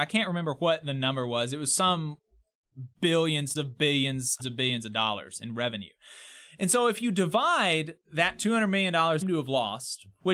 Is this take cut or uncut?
cut